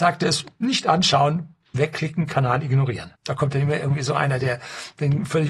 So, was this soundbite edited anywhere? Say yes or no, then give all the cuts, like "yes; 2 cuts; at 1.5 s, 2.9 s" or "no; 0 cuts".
yes; 1 cut; at 3.2 s